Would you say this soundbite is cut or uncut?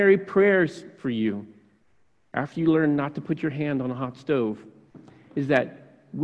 uncut